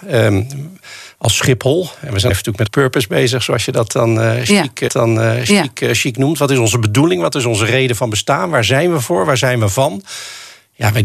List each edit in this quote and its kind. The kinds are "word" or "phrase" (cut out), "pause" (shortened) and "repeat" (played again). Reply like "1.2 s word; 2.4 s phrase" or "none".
2.3 s phrase; 2.7 s word; 4.9 s repeat